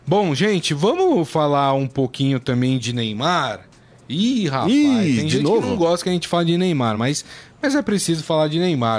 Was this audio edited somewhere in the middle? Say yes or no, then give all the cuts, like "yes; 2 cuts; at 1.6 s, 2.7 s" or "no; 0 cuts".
no; 0 cuts